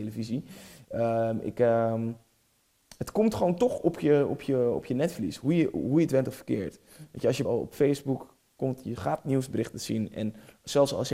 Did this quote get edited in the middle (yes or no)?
yes